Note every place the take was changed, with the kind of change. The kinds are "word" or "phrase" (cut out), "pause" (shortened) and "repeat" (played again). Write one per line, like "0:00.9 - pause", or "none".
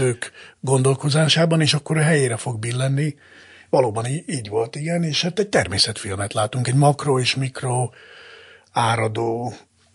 none